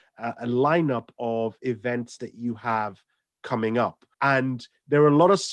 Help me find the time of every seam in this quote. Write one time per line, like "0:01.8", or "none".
0:04.1